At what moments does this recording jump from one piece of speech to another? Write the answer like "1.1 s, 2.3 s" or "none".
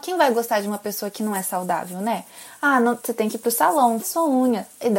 4.0 s